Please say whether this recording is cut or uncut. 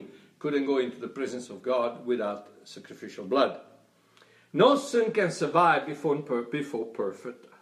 uncut